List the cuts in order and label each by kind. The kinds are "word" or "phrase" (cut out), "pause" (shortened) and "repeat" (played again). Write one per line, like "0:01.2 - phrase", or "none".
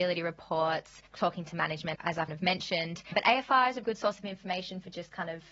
0:01.9 - word
0:02.3 - word
0:03.8 - word

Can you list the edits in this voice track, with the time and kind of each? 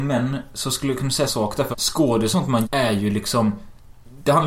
0:01.3 - word
0:01.7 - word
0:02.3 - word
0:02.6 - word

